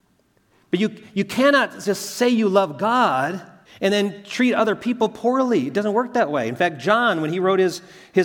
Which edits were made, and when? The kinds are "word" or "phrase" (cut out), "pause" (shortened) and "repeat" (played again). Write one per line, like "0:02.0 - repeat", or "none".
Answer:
0:03.6 - pause